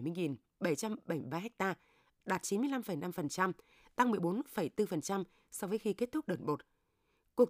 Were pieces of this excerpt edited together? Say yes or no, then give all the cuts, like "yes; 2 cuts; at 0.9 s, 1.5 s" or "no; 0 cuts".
no; 0 cuts